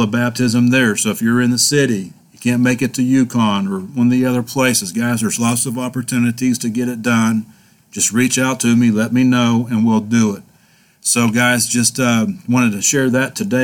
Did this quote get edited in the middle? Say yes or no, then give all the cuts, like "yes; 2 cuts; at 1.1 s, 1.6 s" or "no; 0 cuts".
no; 0 cuts